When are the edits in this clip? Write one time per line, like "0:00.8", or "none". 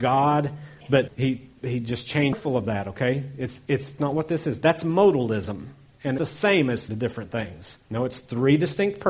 0:01.1
0:04.0
0:06.2
0:06.9
0:07.8